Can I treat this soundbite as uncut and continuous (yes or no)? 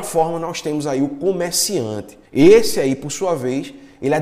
no